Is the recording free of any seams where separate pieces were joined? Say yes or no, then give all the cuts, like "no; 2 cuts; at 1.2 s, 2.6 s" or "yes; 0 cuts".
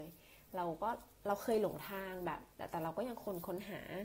no; 1 cut; at 2.5 s